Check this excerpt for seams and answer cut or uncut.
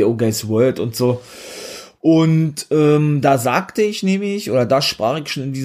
uncut